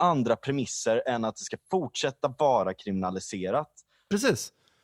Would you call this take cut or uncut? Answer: uncut